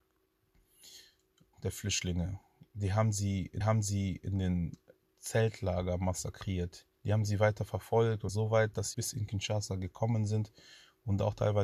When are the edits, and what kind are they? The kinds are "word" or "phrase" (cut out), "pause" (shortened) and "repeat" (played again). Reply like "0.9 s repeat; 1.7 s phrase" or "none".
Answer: 1.5 s phrase; 3.6 s repeat; 6.9 s pause; 8.3 s phrase; 8.9 s word